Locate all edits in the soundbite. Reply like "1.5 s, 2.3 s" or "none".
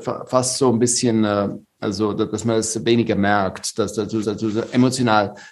4.2 s